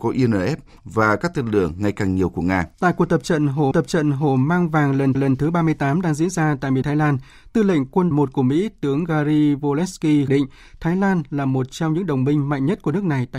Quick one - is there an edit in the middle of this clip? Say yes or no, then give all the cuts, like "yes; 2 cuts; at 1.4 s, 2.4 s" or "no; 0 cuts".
yes; 6 cuts; at 2.7 s, 3.7 s, 5.1 s, 6.8 s, 8.1 s, 10.3 s